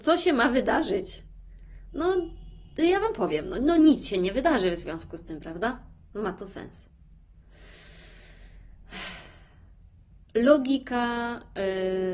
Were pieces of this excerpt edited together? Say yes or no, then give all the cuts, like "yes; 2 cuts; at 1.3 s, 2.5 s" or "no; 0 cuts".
no; 0 cuts